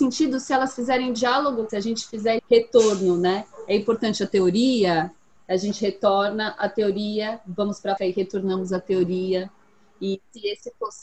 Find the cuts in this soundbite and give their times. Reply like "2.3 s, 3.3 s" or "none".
1.7 s, 2.4 s, 8.0 s